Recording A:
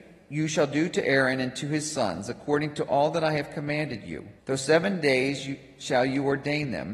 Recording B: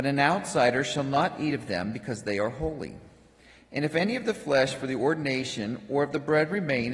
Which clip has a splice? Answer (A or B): A